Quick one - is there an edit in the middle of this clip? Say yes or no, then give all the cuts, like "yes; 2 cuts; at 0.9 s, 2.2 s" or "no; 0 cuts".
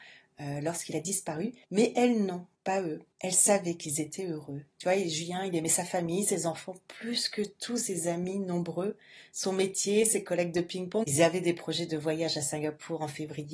yes; 3 cuts; at 1.6 s, 2.5 s, 3.1 s